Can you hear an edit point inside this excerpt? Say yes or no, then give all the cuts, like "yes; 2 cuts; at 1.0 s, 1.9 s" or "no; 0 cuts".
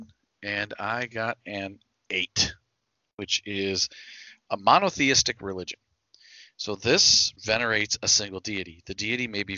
yes; 1 cut; at 7.4 s